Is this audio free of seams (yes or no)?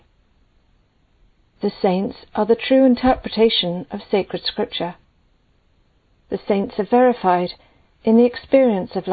yes